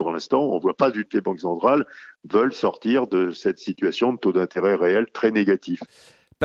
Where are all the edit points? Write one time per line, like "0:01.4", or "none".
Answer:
0:01.1